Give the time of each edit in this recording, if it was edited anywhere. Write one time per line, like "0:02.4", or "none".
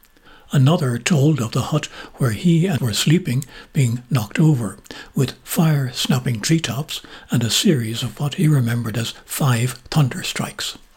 0:02.8